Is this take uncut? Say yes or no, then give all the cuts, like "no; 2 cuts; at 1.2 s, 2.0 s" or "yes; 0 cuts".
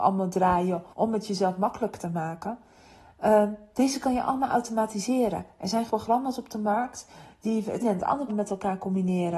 no; 4 cuts; at 0.9 s, 5.9 s, 7.8 s, 8.3 s